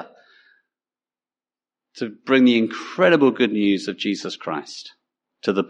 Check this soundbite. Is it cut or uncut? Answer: uncut